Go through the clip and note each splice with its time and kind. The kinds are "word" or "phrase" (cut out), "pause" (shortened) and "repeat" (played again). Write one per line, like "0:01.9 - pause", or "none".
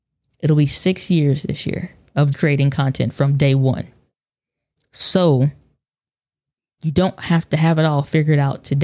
0:02.3 - word